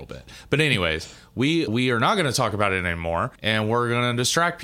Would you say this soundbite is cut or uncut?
cut